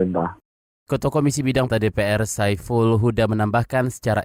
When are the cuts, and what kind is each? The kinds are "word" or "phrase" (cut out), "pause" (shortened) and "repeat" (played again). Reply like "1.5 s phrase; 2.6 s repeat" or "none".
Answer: 1.7 s word